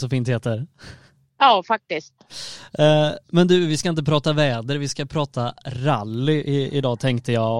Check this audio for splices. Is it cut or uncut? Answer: uncut